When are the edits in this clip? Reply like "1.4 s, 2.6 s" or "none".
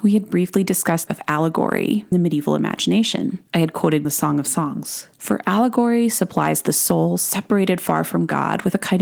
1.1 s, 2.1 s, 3.5 s, 4.0 s, 5.1 s